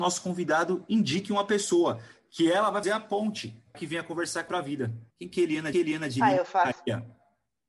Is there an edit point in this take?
yes; 5 cuts; at 2.8 s, 3.7 s, 4.5 s, 5.1 s, 5.7 s

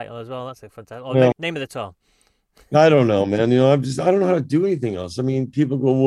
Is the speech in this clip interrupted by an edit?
yes; 1 cut; at 1.3 s

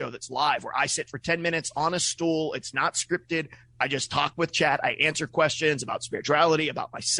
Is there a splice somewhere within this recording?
no; 0 cuts

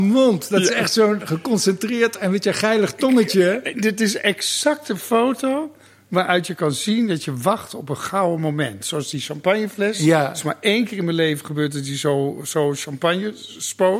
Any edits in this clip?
no; 0 cuts

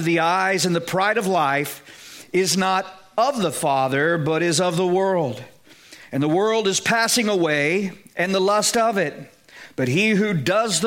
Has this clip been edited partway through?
no; 0 cuts

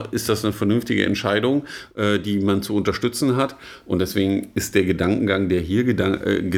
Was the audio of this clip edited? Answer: no; 0 cuts

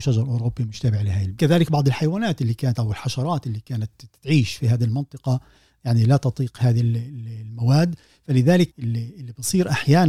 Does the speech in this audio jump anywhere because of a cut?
yes; 1 cut; at 8.7 s

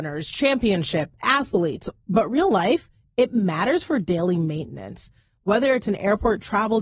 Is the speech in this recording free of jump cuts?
yes; 0 cuts

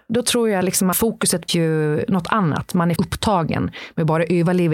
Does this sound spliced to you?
yes; 3 cuts; at 0.9 s, 1.5 s, 3.0 s

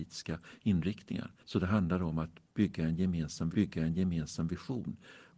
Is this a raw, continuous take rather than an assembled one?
no; 2 cuts; at 1.4 s, 3.5 s

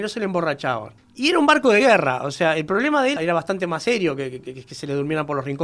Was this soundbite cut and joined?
yes; 2 cuts; at 1.0 s, 3.2 s

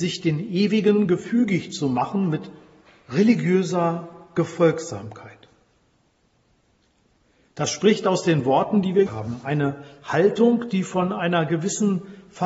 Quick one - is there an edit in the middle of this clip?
yes; 1 cut; at 9.1 s

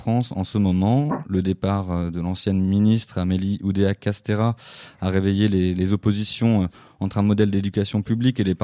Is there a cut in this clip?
no; 0 cuts

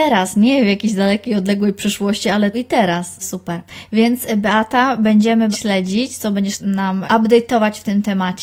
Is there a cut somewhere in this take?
yes; 5 cuts; at 2.5 s, 3.2 s, 5.5 s, 6.6 s, 7.1 s

